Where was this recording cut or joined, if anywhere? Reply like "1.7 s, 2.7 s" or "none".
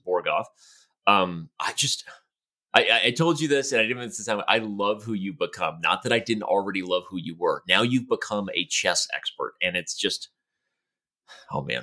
none